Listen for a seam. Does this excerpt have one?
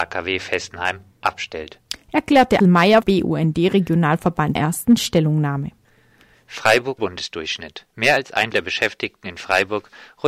yes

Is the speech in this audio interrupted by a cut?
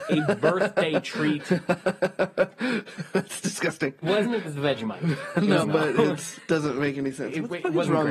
yes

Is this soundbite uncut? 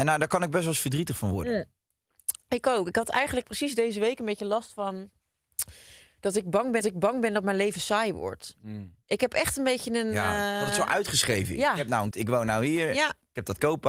no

